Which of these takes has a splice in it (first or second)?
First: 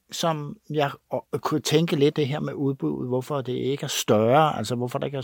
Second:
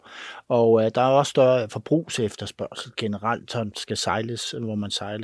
first